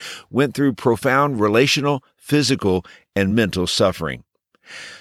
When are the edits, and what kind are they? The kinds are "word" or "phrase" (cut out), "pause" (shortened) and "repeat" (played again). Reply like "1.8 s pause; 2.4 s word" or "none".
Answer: none